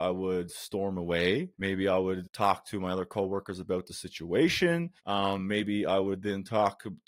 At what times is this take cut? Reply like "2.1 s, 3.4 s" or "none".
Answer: 1.5 s, 2.2 s, 5.0 s